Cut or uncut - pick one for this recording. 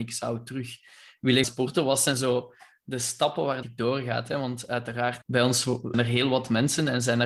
cut